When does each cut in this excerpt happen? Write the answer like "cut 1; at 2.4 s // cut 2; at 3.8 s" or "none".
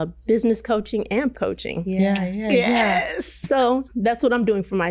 cut 1; at 1.3 s // cut 2; at 3.9 s